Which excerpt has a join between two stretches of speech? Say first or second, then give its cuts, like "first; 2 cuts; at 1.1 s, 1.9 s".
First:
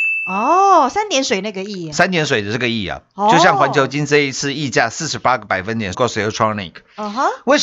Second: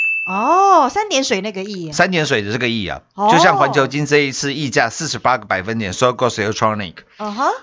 first; 1 cut; at 5.9 s